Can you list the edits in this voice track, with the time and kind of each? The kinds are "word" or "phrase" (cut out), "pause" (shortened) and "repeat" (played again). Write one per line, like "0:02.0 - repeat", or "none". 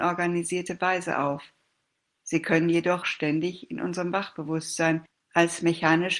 0:03.0 - word